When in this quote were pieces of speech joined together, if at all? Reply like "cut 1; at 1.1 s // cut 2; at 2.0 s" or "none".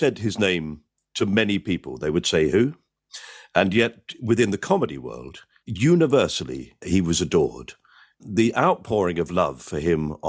none